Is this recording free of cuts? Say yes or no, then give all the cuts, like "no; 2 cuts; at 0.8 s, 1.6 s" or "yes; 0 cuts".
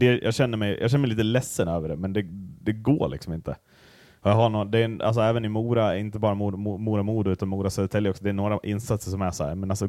yes; 0 cuts